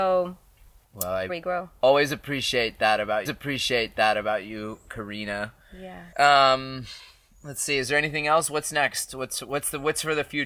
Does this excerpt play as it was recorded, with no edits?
no; 3 cuts; at 1.3 s, 3.3 s, 6.1 s

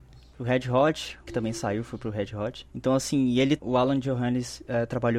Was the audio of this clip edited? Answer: yes; 3 cuts; at 1.3 s, 2.7 s, 3.6 s

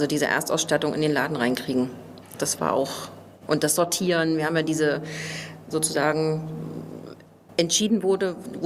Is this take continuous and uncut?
no; 2 cuts; at 3.3 s, 5.7 s

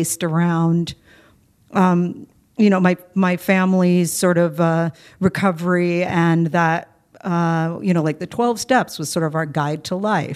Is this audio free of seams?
yes; 0 cuts

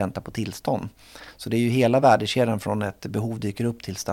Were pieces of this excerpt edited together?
no; 0 cuts

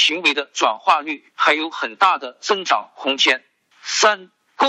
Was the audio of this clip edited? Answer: yes; 1 cut; at 1.3 s

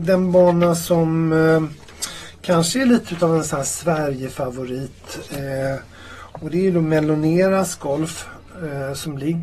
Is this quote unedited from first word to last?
yes; 0 cuts

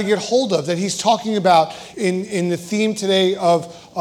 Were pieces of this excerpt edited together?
yes; 1 cut; at 1.9 s

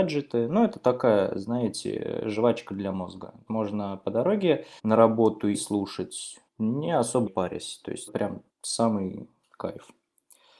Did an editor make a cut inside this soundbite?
yes; 7 cuts; at 3.5 s, 4.8 s, 5.5 s, 6.5 s, 7.3 s, 8.1 s, 8.5 s

